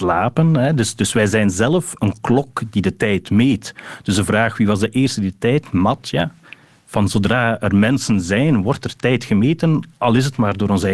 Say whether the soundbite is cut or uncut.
uncut